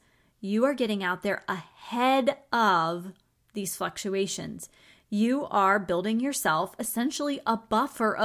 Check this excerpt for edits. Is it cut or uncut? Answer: uncut